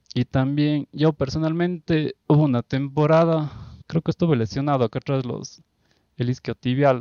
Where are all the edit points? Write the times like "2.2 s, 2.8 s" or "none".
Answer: 2.2 s, 3.8 s